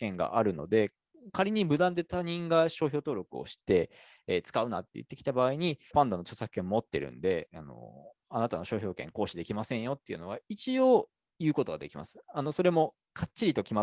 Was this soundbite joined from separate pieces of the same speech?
yes; 1 cut; at 5.9 s

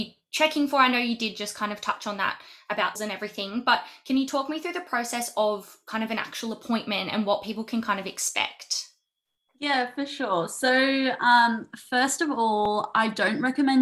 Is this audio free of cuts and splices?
no; 1 cut; at 3.0 s

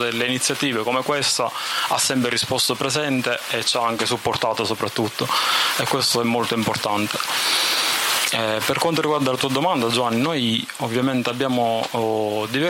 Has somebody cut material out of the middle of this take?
no; 0 cuts

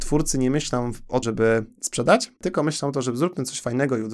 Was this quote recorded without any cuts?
no; 2 cuts; at 1.2 s, 2.4 s

